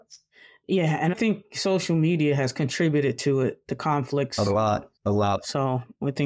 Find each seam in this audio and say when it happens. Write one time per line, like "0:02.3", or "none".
0:01.1
0:05.0